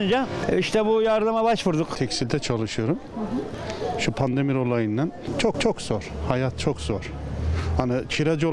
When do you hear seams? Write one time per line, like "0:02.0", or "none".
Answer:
0:05.5